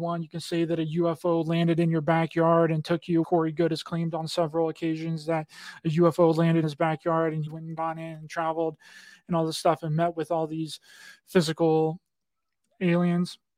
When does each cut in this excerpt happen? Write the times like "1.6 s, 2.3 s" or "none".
3.2 s, 6.6 s, 7.5 s, 7.8 s